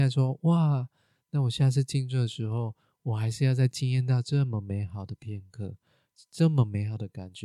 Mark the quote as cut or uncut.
uncut